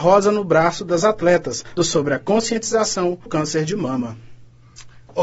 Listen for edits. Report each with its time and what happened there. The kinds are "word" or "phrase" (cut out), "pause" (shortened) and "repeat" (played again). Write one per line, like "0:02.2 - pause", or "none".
0:01.8 - word
0:03.3 - word